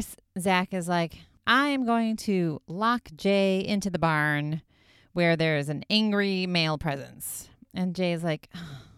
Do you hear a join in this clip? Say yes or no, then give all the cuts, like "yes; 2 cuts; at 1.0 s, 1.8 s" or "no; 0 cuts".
no; 0 cuts